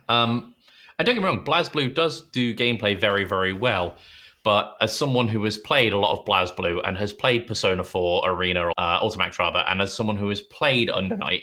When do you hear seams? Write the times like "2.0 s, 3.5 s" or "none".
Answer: 8.7 s